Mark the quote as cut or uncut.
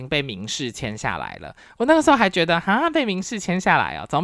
uncut